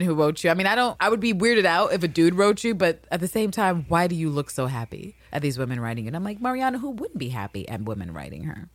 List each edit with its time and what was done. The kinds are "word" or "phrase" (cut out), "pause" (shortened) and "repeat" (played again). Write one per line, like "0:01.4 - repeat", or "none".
none